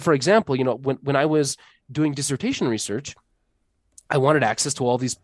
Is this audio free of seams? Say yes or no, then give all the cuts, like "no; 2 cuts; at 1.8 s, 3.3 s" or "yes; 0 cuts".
yes; 0 cuts